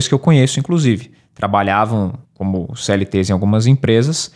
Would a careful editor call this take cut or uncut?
cut